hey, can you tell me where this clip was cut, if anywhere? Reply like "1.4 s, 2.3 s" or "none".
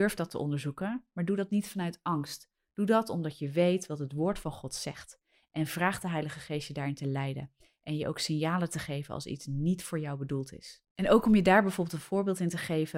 none